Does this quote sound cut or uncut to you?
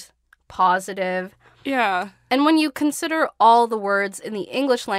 uncut